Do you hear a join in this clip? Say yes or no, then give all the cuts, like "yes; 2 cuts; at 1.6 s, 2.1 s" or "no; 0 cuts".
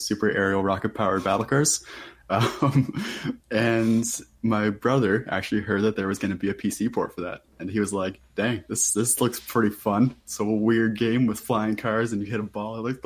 yes; 2 cuts; at 3.4 s, 7.5 s